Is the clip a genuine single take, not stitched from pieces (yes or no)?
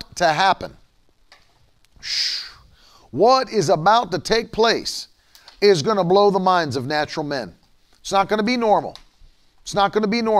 yes